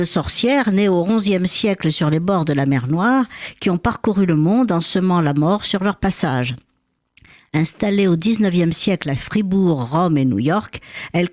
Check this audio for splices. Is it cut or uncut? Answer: uncut